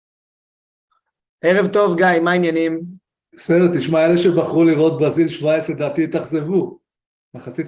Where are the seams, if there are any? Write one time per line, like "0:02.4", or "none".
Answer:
0:03.1